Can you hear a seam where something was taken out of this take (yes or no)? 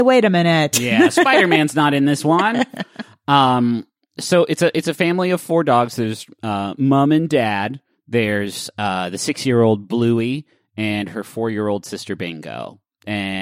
no